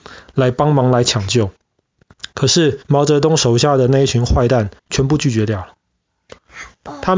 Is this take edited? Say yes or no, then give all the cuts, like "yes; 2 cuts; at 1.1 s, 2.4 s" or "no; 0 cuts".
yes; 3 cuts; at 1.6 s, 2.8 s, 4.8 s